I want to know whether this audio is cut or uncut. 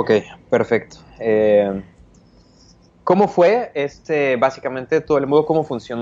uncut